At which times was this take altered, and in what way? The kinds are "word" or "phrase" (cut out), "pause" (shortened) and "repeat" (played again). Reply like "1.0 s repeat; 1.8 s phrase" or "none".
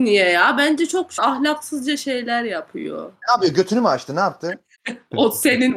1.2 s word; 4.8 s pause